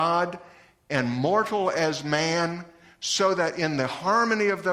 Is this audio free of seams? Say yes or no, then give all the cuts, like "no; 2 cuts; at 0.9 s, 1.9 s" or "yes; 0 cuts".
yes; 0 cuts